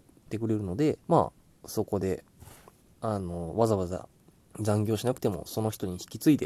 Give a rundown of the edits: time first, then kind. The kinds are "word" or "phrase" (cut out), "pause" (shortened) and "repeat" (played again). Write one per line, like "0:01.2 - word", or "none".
0:01.0 - pause
0:02.8 - pause
0:04.4 - pause